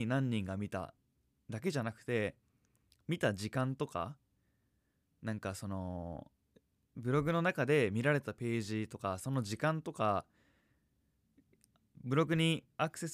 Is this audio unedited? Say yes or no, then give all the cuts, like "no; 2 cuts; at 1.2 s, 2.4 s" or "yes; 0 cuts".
yes; 0 cuts